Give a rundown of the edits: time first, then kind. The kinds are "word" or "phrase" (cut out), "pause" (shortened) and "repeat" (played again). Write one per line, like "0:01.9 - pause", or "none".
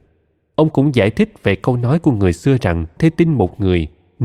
0:03.0 - word